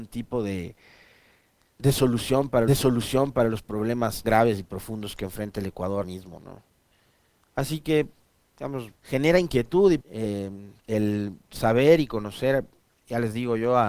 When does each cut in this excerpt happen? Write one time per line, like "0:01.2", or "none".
0:02.7
0:04.2
0:06.0
0:09.0
0:10.0
0:10.8